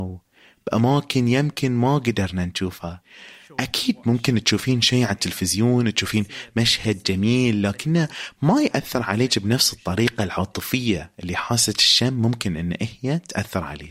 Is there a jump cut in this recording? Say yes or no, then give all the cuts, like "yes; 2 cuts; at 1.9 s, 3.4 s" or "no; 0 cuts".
no; 0 cuts